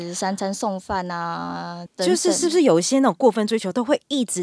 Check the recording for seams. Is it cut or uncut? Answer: cut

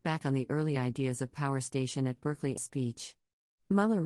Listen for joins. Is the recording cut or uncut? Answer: cut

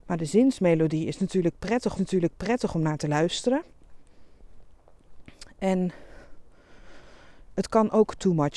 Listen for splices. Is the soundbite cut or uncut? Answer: cut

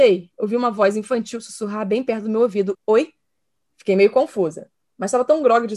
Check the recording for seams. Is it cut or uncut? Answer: cut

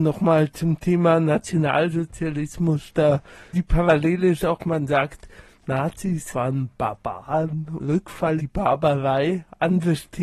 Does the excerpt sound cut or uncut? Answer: cut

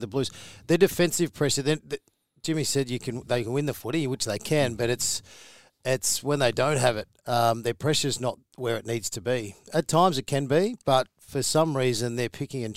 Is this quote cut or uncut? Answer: uncut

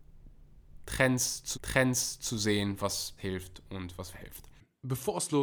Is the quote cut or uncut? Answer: cut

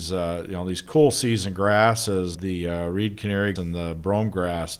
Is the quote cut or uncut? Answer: cut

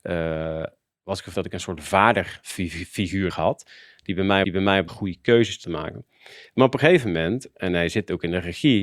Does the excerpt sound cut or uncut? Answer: cut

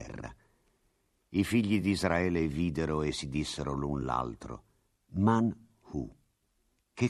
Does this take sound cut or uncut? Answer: uncut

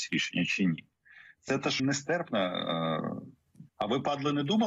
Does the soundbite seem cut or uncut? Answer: cut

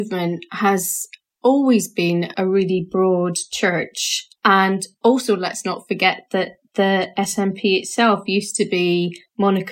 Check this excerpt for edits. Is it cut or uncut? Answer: uncut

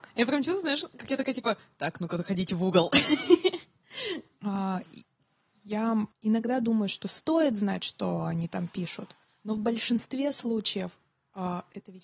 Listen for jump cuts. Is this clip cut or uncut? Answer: uncut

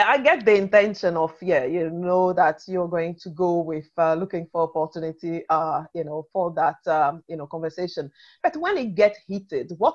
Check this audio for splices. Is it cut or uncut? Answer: uncut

